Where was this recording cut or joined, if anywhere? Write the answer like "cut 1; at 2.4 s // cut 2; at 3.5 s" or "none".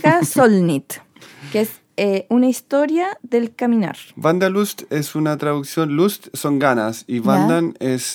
cut 1; at 3.2 s // cut 2; at 4.1 s